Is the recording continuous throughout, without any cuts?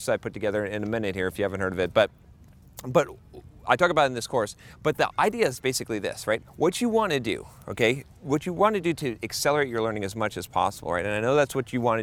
yes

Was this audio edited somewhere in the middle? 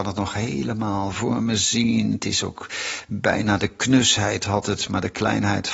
no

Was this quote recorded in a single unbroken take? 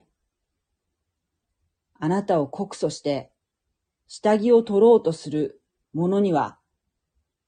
yes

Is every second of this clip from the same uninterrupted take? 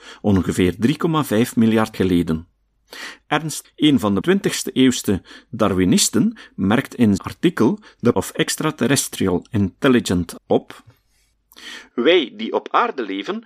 no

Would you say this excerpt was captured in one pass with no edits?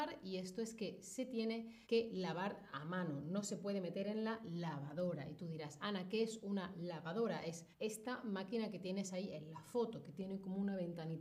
no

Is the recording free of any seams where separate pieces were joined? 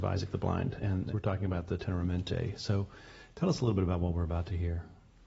yes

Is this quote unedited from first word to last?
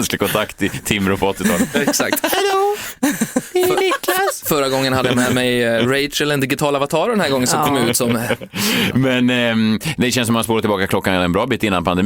yes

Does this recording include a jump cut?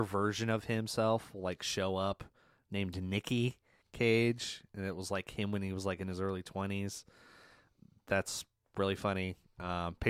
no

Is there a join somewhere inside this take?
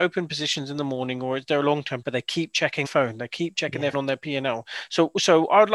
yes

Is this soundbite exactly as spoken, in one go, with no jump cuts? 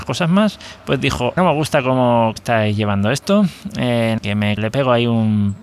no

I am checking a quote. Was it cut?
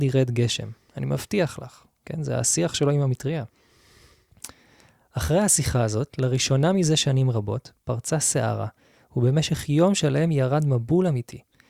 no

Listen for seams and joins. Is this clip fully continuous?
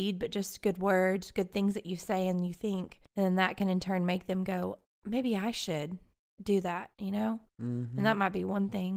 no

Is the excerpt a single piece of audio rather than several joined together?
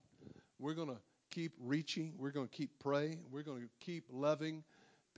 yes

